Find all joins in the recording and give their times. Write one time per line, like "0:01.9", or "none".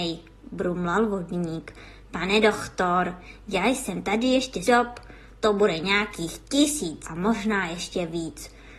0:04.7
0:07.0